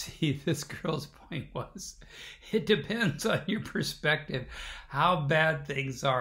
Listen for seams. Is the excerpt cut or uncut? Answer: uncut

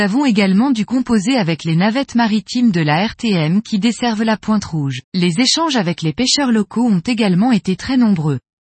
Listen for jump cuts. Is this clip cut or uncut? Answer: cut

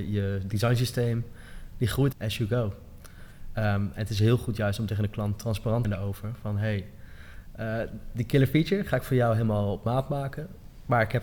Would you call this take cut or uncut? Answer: cut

